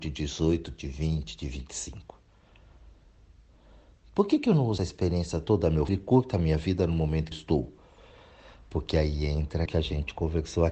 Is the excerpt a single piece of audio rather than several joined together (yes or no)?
no